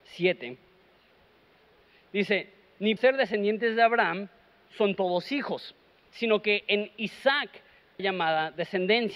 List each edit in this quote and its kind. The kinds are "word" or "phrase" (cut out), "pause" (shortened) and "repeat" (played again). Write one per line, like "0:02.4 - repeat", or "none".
0:03.0 - word
0:08.0 - word